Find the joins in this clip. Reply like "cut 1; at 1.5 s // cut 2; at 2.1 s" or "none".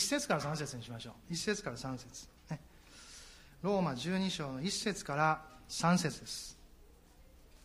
none